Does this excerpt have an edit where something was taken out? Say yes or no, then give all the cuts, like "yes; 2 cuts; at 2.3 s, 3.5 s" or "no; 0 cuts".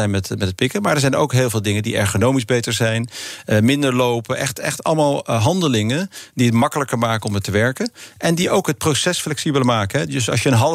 no; 0 cuts